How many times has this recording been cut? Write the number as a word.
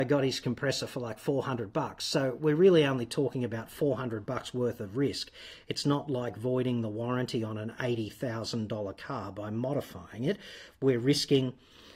zero